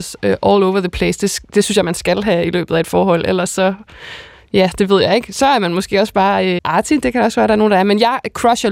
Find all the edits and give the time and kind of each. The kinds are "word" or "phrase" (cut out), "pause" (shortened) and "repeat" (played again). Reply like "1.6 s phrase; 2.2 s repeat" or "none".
6.6 s word